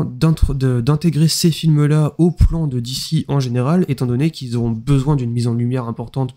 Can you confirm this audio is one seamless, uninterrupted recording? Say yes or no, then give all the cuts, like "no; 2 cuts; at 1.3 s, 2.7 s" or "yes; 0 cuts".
yes; 0 cuts